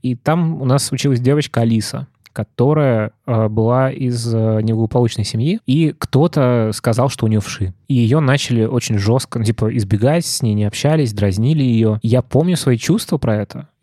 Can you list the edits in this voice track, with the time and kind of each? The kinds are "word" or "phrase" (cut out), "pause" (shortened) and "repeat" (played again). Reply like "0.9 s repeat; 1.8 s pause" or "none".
none